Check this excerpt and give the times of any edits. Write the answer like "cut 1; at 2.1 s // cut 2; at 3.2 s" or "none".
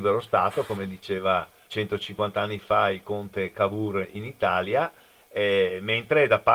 cut 1; at 1.7 s